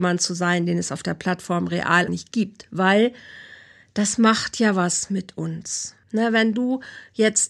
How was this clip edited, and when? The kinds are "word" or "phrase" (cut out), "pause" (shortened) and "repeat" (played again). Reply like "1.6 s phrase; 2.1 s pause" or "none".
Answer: 2.1 s phrase; 6.0 s pause